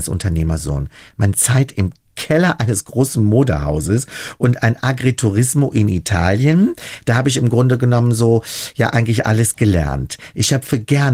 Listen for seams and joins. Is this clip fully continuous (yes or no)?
yes